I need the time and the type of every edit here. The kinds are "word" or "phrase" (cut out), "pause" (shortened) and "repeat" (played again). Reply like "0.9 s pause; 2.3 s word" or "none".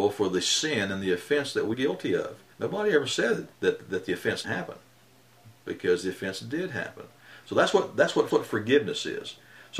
1.7 s word; 2.5 s pause; 3.5 s pause; 4.4 s word; 8.3 s repeat